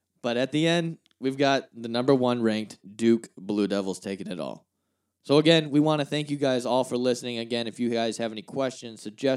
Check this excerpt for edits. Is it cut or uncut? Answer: uncut